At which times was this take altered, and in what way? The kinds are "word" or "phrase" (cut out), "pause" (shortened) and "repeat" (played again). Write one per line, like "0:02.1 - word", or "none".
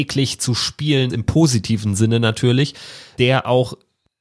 0:01.1 - word